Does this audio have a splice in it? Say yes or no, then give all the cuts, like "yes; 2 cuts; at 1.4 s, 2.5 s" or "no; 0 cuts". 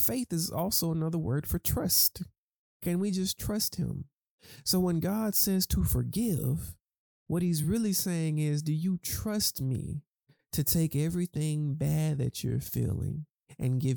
no; 0 cuts